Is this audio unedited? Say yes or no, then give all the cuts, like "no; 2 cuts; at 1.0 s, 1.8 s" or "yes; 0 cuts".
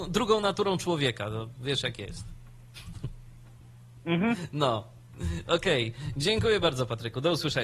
yes; 0 cuts